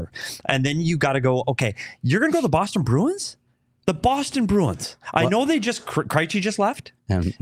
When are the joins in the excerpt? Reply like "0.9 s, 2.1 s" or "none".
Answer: none